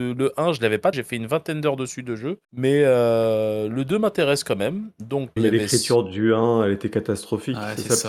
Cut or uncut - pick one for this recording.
cut